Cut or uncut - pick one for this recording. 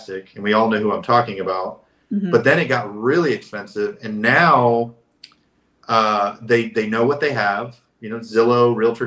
uncut